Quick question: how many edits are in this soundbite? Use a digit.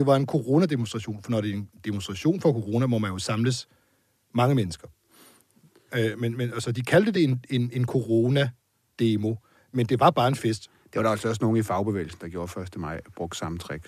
0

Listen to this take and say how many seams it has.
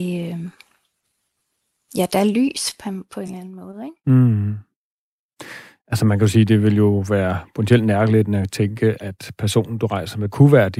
0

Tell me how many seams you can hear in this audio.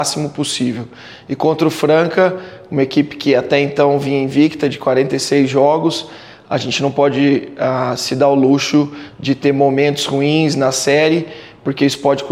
0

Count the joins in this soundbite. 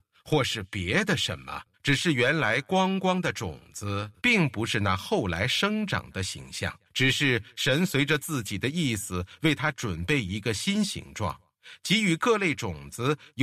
3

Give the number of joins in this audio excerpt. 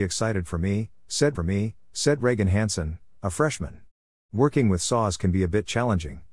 1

